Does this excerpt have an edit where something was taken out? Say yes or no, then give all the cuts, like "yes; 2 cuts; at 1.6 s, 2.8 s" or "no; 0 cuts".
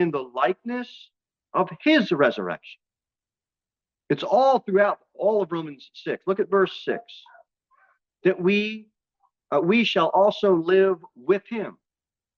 no; 0 cuts